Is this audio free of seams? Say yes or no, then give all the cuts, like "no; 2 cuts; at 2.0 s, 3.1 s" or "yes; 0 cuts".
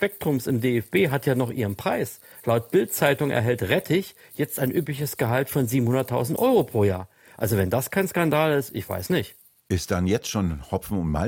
yes; 0 cuts